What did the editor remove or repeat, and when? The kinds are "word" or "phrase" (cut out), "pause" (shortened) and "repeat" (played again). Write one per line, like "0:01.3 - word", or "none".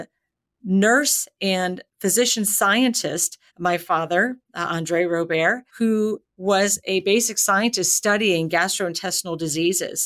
0:03.5 - pause
0:05.7 - pause